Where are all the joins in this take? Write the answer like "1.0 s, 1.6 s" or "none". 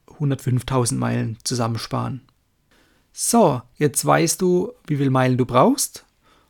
none